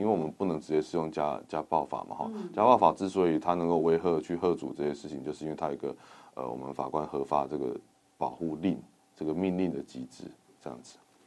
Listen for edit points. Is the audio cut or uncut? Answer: uncut